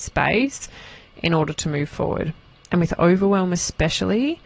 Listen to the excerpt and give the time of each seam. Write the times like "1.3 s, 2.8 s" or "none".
none